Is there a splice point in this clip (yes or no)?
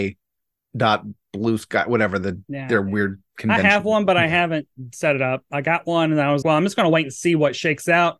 yes